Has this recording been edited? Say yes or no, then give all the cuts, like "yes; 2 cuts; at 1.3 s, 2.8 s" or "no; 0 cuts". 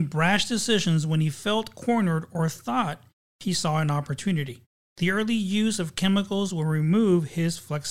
no; 0 cuts